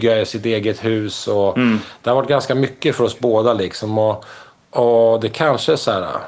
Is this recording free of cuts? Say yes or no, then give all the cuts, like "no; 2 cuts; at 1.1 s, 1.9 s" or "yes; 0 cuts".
yes; 0 cuts